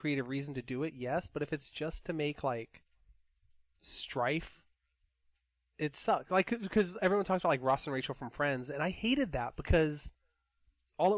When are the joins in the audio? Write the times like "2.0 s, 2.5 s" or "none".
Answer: none